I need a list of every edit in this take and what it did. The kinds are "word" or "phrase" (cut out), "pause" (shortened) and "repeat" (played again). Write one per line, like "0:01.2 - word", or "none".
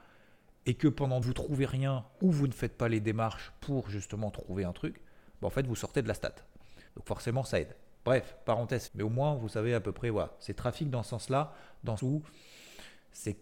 0:01.2 - phrase
0:06.9 - pause
0:08.9 - word
0:12.0 - word